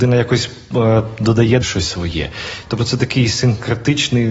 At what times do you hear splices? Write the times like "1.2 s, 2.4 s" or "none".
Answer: 1.6 s